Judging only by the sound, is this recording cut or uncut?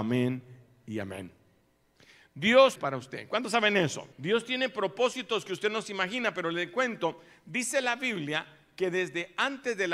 cut